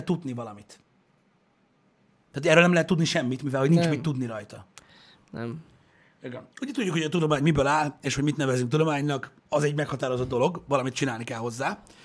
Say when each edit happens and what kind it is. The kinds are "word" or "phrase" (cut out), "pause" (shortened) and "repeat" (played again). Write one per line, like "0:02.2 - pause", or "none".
0:06.5 - pause
0:09.4 - pause